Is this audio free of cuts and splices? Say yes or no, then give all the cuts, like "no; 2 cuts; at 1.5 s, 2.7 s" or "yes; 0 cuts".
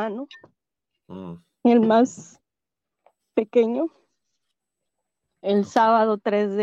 yes; 0 cuts